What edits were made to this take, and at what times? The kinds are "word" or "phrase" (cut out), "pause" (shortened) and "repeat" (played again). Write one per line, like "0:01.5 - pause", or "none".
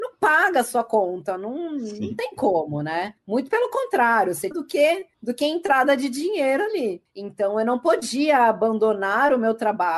0:04.5 - phrase